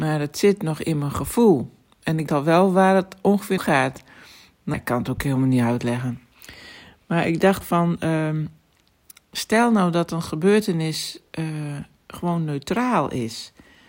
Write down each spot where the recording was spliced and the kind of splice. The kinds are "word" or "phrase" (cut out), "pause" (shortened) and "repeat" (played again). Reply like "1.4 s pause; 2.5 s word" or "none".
2.3 s word; 3.6 s word; 4.7 s word; 7.6 s word